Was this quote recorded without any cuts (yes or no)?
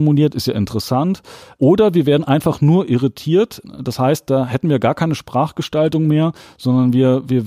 yes